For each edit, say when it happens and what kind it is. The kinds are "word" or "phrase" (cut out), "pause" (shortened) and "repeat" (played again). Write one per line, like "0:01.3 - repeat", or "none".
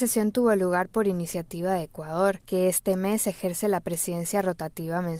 none